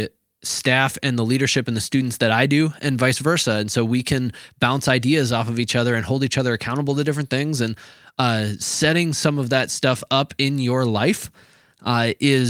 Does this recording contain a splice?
no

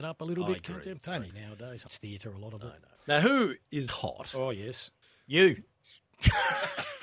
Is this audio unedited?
no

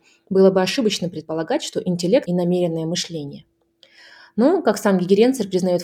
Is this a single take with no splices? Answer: no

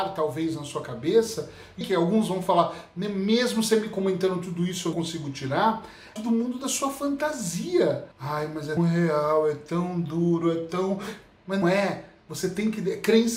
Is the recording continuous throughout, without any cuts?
no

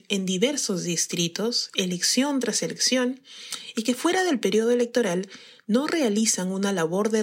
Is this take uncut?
yes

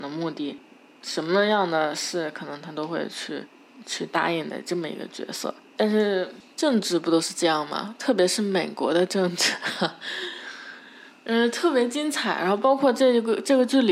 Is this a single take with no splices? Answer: yes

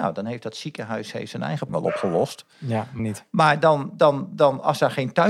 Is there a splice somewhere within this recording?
yes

